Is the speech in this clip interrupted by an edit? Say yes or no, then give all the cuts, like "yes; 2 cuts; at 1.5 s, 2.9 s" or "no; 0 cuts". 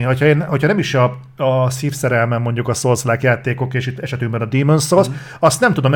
no; 0 cuts